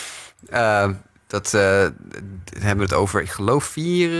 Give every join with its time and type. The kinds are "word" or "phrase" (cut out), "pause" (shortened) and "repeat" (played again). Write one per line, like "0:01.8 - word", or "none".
none

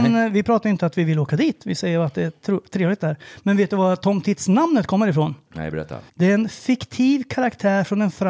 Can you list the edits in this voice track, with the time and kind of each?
0:06.1 - pause

